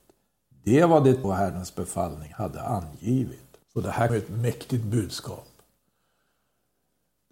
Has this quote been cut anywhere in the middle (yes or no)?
yes